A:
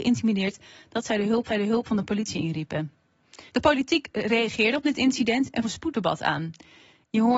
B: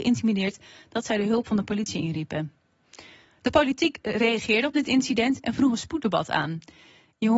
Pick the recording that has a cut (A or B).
A